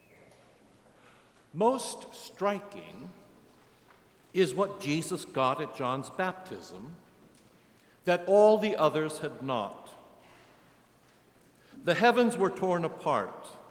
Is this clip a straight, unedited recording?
yes; 0 cuts

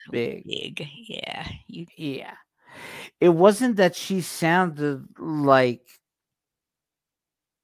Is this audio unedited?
yes; 0 cuts

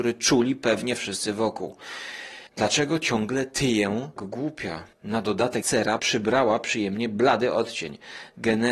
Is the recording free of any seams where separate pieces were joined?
no; 5 cuts; at 2.5 s, 4.2 s, 4.9 s, 5.6 s, 6.0 s

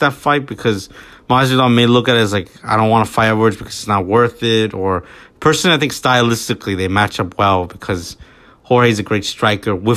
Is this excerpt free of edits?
yes; 0 cuts

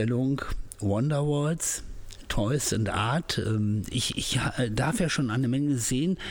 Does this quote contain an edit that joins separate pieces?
no; 0 cuts

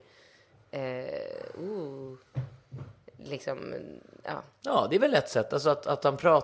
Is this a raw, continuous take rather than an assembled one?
yes; 0 cuts

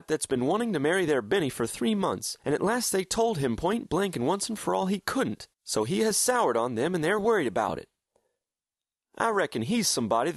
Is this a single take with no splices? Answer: no; 2 cuts; at 2.4 s, 5.5 s

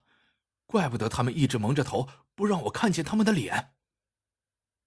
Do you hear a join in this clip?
no; 0 cuts

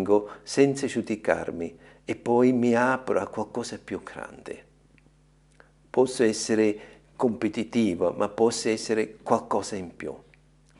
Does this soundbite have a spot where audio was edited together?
no; 0 cuts

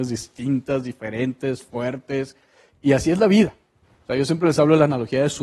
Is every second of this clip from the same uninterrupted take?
yes; 0 cuts

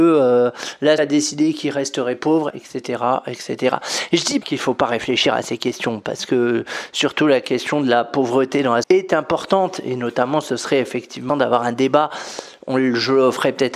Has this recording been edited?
yes; 5 cuts; at 1.0 s, 2.5 s, 4.4 s, 8.8 s, 11.3 s

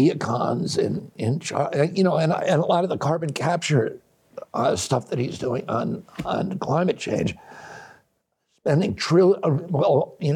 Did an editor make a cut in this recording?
no; 0 cuts

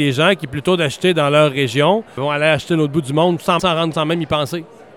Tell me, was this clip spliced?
yes; 3 cuts; at 2.2 s, 3.6 s, 3.9 s

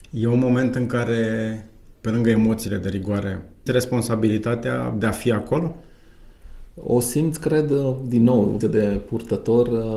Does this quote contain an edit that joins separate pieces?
yes; 2 cuts; at 3.7 s, 8.6 s

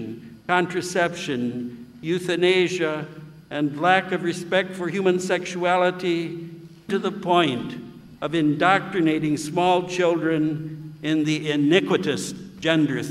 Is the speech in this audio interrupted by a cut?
yes; 1 cut; at 6.9 s

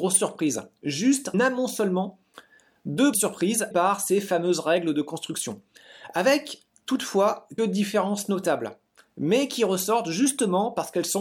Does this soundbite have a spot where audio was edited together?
yes; 4 cuts; at 1.3 s, 3.1 s, 3.7 s, 7.6 s

